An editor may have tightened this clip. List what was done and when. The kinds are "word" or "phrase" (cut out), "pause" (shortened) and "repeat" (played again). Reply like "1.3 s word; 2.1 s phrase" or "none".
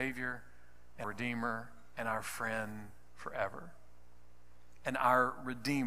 1.0 s word